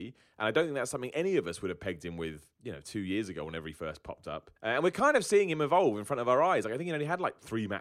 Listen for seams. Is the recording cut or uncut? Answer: cut